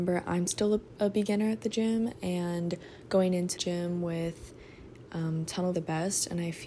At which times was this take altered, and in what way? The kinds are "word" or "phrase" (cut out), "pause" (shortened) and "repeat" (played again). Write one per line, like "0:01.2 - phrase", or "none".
0:03.6 - word
0:05.7 - phrase